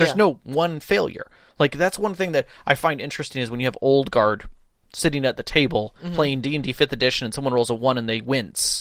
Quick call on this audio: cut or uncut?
uncut